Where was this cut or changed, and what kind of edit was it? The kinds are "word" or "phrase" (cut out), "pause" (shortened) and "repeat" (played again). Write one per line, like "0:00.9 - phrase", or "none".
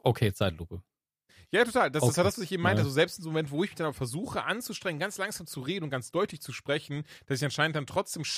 none